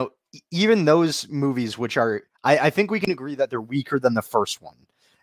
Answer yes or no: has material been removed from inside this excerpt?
yes